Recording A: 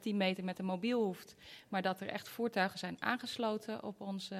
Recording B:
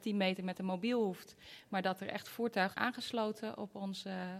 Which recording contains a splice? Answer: B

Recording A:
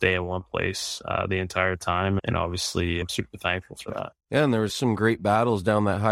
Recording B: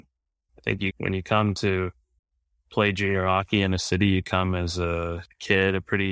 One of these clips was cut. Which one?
A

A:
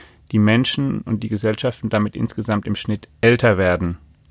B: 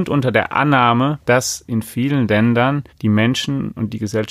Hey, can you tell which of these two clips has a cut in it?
B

